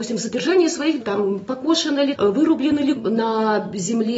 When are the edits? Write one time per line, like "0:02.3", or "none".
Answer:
0:01.0
0:02.1
0:03.0